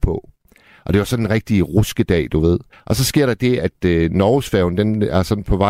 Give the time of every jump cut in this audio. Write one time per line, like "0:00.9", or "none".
0:02.7